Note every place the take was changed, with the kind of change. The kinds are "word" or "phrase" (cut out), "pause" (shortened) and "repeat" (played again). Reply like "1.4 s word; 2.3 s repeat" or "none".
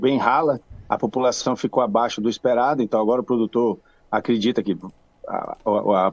none